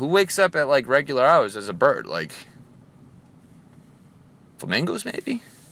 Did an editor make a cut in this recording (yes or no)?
no